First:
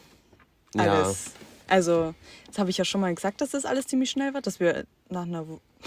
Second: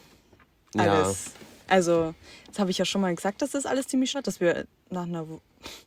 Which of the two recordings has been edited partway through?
second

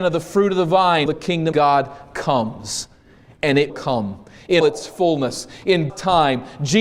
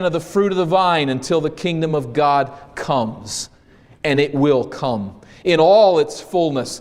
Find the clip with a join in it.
first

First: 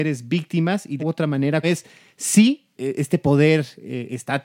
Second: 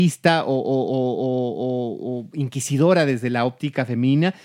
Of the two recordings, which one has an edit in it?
first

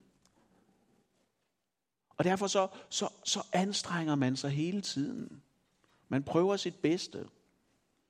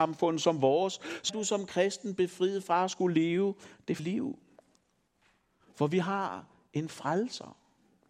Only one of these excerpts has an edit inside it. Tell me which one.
second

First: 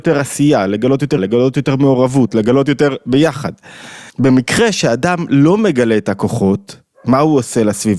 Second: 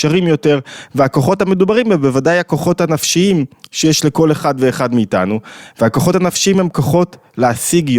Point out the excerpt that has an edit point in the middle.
first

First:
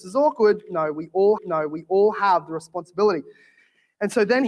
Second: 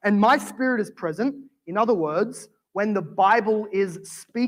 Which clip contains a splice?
first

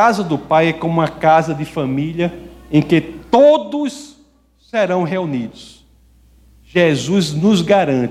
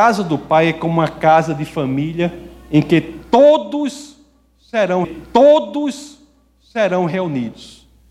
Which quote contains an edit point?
second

